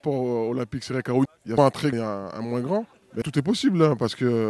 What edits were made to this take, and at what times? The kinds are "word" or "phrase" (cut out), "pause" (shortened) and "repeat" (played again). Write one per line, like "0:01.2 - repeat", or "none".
0:01.2 - word
0:01.6 - word
0:01.9 - word
0:03.2 - word